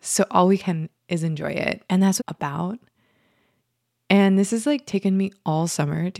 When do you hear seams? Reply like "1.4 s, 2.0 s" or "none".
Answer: 1.0 s, 1.8 s, 2.2 s